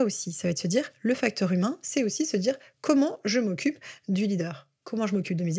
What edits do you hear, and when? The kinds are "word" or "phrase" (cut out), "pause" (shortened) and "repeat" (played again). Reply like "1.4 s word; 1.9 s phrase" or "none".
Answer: none